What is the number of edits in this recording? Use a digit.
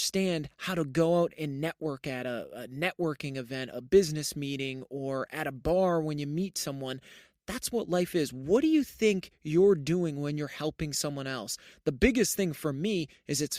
0